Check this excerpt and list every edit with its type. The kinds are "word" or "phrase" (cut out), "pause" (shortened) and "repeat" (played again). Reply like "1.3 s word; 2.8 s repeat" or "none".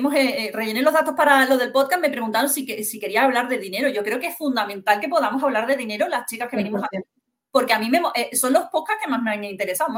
none